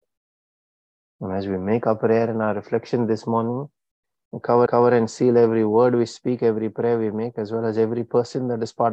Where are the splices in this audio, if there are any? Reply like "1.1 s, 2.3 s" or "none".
4.7 s

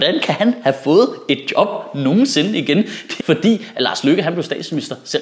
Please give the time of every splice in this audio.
3.2 s

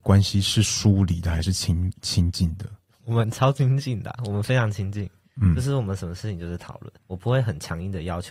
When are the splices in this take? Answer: 7.0 s

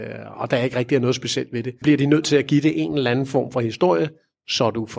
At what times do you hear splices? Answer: 1.8 s

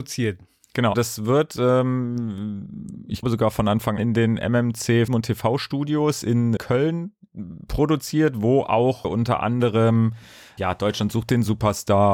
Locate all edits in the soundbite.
0.9 s, 3.2 s, 4.0 s, 5.1 s, 6.6 s, 9.0 s, 10.6 s

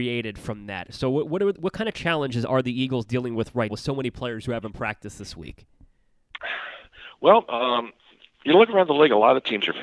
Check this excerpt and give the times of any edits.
3.7 s

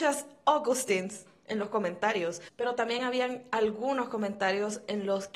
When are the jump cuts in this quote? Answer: none

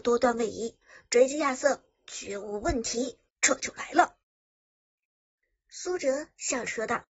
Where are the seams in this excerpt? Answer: 3.3 s

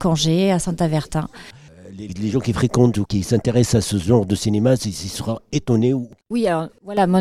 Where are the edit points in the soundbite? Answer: 2.1 s, 3.1 s

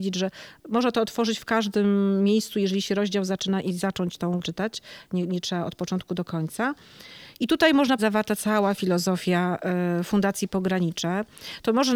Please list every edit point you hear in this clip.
4.4 s, 8.0 s

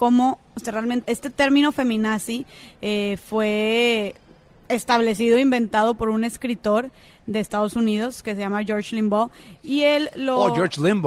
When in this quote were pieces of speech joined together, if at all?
1.0 s

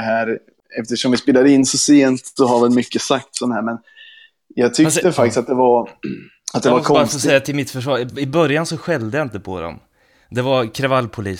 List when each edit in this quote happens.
none

